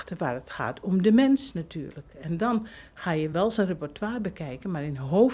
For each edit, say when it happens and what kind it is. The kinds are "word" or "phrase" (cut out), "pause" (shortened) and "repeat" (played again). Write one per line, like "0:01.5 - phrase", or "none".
none